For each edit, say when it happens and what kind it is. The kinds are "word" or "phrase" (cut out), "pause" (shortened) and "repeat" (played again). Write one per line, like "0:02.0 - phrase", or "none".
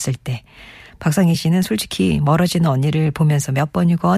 none